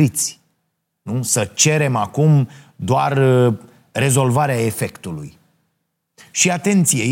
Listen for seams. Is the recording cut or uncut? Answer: uncut